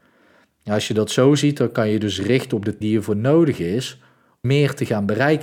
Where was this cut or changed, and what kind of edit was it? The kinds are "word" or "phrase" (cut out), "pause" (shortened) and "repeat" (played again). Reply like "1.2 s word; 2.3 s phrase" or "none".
2.8 s word; 4.4 s word